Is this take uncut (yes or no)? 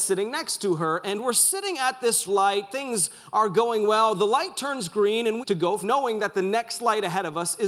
no